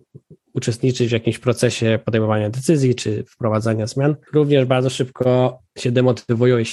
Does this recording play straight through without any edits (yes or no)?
no